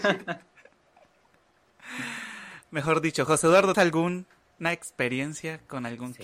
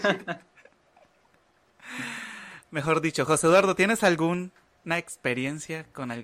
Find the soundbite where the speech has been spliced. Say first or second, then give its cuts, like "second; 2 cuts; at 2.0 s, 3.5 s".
first; 1 cut; at 3.7 s